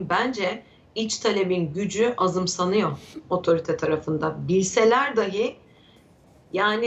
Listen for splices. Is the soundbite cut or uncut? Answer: uncut